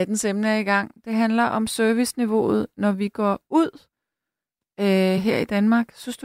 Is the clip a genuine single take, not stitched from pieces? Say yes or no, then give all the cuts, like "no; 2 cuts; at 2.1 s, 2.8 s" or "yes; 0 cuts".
yes; 0 cuts